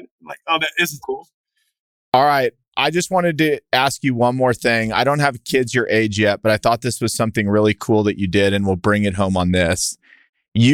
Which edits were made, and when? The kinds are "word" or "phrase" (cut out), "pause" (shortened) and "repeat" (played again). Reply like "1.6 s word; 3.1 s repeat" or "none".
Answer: 1.0 s word